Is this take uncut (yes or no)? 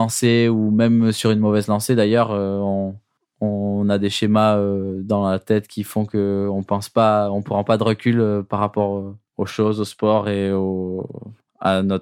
yes